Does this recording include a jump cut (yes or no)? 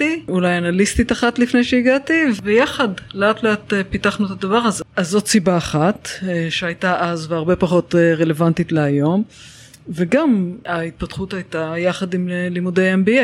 no